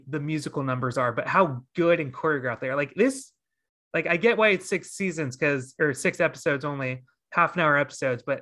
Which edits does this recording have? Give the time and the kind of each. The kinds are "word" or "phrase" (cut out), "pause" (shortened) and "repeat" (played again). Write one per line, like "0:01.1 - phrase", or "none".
none